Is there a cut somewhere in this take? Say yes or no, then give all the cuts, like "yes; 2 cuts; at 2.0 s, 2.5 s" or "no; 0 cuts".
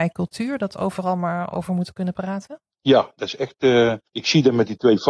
yes; 2 cuts; at 2.7 s, 4.1 s